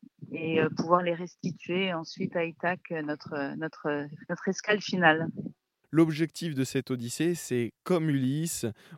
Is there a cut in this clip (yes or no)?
no